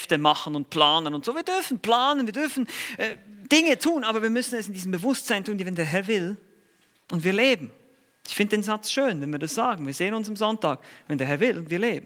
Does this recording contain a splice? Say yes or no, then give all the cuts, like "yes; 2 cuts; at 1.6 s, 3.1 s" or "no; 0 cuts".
no; 0 cuts